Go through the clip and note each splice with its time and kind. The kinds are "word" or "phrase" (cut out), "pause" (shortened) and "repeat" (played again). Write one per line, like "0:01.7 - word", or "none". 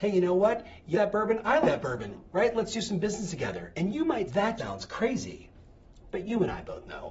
0:00.9 - word
0:01.6 - word
0:04.3 - word
0:04.6 - word